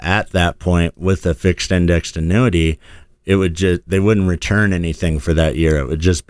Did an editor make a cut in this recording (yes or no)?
no